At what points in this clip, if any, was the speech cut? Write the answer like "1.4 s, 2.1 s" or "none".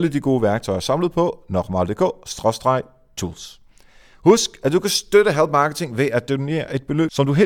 none